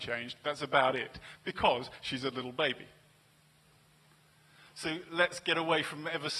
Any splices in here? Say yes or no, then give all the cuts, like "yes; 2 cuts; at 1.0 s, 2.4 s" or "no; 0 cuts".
no; 0 cuts